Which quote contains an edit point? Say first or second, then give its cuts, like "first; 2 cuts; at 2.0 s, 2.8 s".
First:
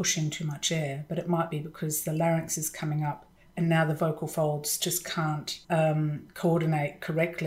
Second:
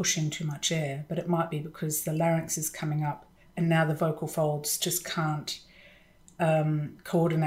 first; 1 cut; at 5.6 s